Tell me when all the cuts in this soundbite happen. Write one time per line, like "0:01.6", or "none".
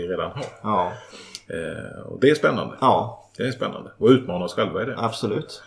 none